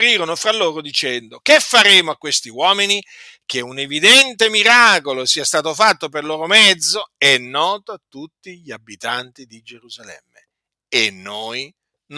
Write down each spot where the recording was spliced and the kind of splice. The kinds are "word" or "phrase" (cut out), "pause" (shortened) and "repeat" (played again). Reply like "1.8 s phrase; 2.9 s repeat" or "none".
none

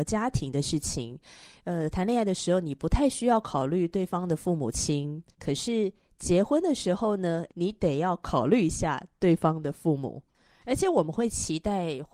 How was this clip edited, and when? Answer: 5.3 s pause; 7.5 s word

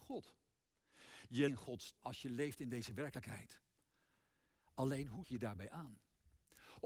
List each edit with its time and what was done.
1.5 s word; 2.0 s word; 5.2 s word

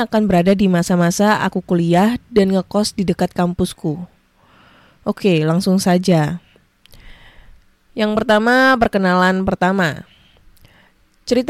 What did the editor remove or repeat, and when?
none

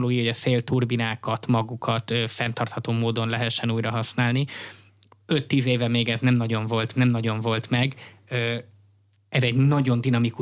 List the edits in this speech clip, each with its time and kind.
6.9 s repeat

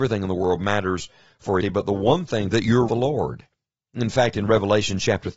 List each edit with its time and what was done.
1.6 s word; 2.5 s phrase; 2.9 s phrase

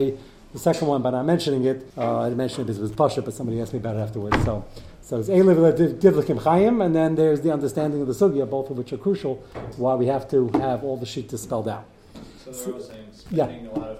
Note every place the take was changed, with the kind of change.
1.9 s pause

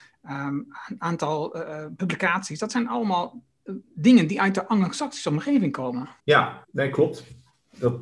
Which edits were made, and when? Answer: 3.8 s pause; 6.2 s pause; 6.6 s pause

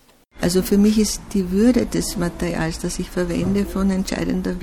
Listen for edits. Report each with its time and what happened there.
none

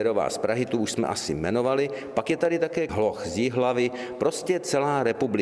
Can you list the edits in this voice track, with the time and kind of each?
2.9 s word

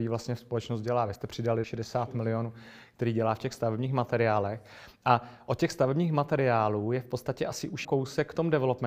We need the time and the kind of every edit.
1.2 s word; 1.6 s word; 7.8 s word

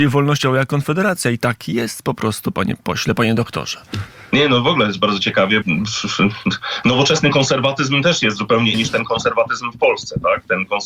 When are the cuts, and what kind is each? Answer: 5.6 s word; 8.7 s word

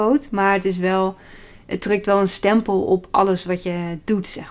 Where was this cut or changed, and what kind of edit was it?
none

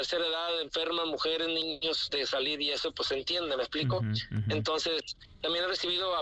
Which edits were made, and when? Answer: none

